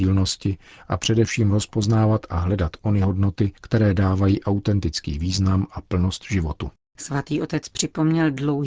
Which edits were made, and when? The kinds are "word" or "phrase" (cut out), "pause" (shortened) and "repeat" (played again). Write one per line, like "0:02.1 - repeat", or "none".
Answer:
0:03.6 - pause